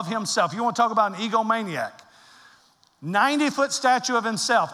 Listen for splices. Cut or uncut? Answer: uncut